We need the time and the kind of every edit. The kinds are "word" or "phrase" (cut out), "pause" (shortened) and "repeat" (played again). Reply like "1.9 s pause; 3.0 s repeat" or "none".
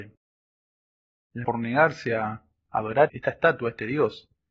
1.4 s word; 3.1 s word